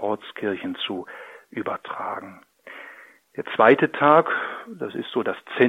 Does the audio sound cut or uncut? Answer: uncut